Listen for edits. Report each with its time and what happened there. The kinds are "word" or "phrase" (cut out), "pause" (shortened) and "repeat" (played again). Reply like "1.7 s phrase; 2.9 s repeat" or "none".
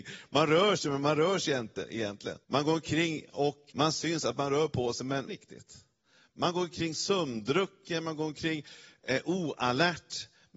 2.4 s pause; 3.7 s word; 5.3 s phrase